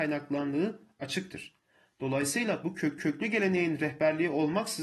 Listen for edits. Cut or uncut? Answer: cut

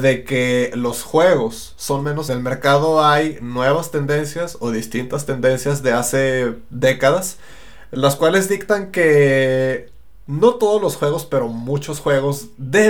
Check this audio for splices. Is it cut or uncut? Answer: cut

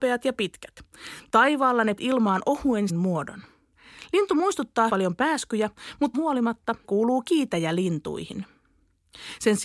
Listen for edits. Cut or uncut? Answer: cut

